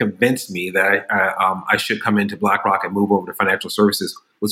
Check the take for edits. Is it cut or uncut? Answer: uncut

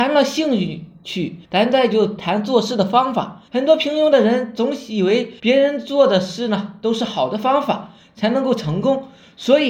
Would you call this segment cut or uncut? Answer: cut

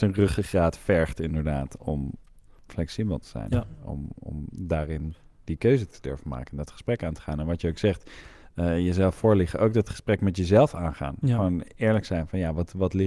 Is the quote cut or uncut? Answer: uncut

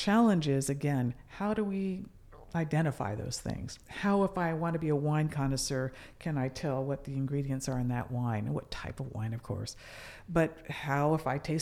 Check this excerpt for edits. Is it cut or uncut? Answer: cut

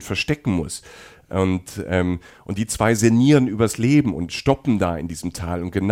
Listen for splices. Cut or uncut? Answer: uncut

